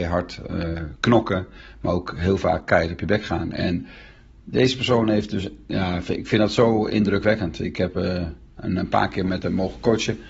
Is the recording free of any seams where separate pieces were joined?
yes; 0 cuts

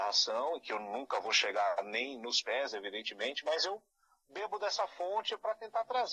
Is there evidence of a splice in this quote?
no; 0 cuts

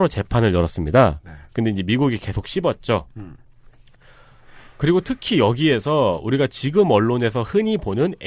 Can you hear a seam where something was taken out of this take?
no; 0 cuts

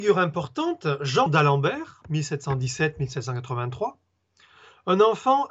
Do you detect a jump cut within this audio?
yes; 1 cut; at 1.3 s

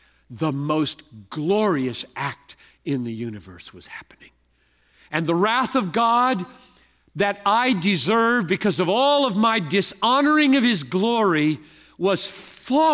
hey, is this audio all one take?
yes; 0 cuts

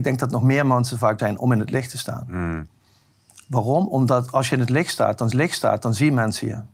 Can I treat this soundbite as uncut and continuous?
no; 2 cuts; at 1.2 s, 5.3 s

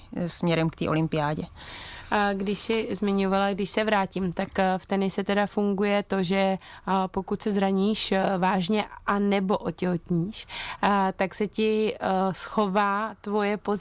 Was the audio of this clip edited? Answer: no; 0 cuts

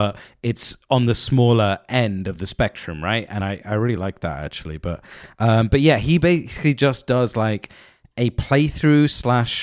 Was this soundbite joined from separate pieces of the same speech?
no; 0 cuts

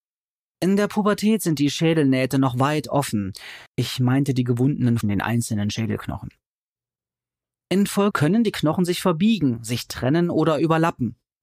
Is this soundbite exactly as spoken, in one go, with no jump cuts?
no; 3 cuts; at 3.7 s, 5.0 s, 8.1 s

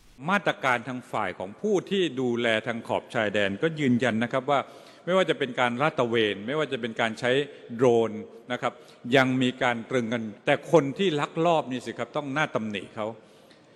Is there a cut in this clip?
yes; 1 cut; at 10.4 s

